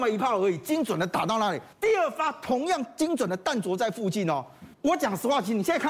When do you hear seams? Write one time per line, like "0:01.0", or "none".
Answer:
0:01.7
0:04.7